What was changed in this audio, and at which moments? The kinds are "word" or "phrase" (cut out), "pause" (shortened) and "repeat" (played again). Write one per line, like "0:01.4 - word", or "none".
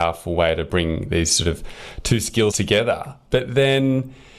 0:02.5 - word